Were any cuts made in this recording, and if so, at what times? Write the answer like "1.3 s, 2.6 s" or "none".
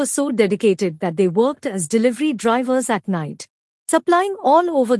none